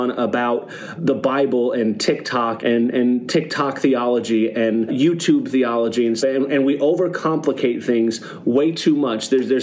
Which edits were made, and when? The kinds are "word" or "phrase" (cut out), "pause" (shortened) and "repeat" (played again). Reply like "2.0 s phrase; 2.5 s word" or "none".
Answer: 1.0 s word; 2.6 s word; 4.9 s word; 6.2 s word